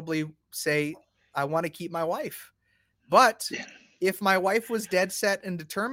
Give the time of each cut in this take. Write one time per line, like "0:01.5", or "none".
none